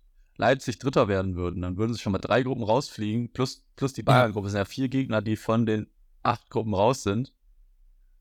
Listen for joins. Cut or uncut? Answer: uncut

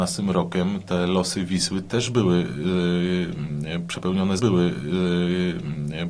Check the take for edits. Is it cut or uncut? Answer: cut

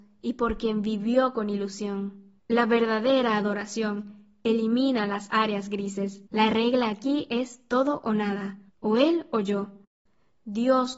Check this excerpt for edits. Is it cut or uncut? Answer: cut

